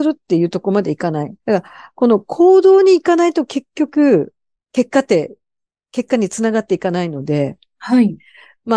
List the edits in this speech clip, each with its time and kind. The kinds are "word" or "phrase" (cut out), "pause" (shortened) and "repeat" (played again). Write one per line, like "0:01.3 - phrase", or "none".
0:01.4 - pause